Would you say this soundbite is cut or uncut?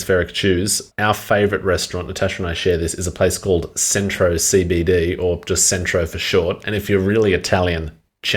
uncut